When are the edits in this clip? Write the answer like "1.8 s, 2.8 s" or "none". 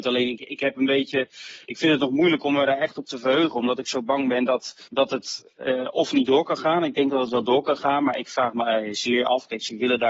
4.9 s